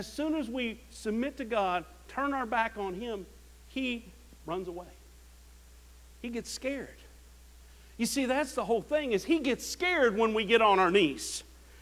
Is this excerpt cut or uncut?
uncut